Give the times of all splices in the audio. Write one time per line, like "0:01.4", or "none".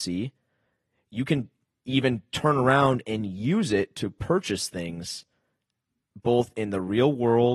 none